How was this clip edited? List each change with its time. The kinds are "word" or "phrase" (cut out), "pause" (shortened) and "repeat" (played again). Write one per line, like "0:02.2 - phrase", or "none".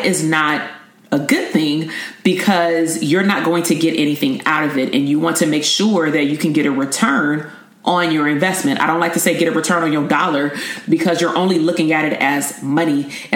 none